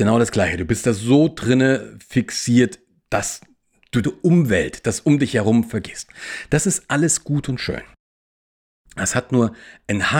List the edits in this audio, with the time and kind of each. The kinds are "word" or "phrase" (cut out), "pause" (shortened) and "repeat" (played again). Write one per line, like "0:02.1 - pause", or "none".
0:04.0 - phrase

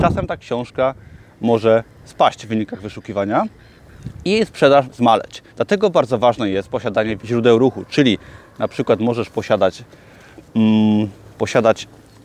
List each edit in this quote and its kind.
0:04.8 - word
0:05.5 - pause
0:07.2 - phrase

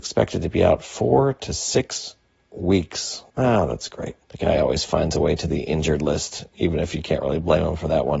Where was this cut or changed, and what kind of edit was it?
0:03.3 - pause
0:04.2 - pause

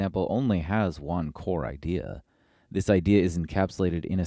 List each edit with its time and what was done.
none

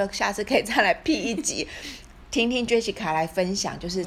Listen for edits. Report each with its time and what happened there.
none

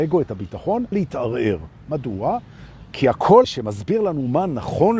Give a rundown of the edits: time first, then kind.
0:00.9 - word
0:03.4 - word

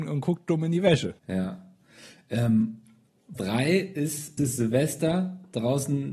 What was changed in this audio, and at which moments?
0:01.2 - pause
0:03.4 - word
0:04.4 - phrase

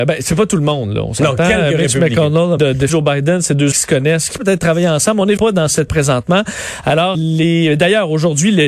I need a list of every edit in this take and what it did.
0:02.6 - word
0:02.9 - word
0:03.7 - word
0:04.4 - word
0:05.4 - word
0:05.9 - word
0:07.1 - word

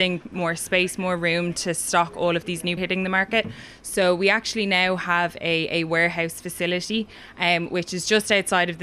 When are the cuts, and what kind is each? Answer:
0:02.8 - phrase

